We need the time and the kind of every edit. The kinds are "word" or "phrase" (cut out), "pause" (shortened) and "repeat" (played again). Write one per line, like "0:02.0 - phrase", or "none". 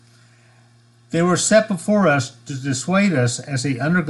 none